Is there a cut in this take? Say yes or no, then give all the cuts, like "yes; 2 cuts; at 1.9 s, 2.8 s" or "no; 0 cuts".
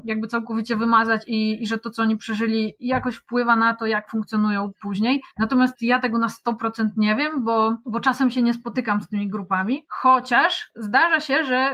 no; 0 cuts